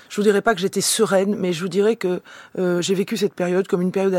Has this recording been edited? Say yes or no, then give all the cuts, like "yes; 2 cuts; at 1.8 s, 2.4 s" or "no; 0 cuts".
no; 0 cuts